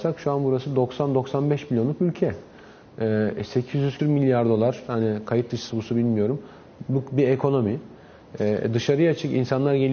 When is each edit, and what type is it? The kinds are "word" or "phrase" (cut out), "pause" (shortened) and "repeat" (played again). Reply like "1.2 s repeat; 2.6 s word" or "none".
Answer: 4.0 s word; 5.7 s word